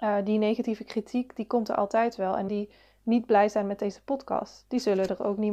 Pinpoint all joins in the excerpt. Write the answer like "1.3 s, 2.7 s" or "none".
2.5 s